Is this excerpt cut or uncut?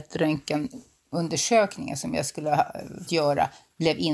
cut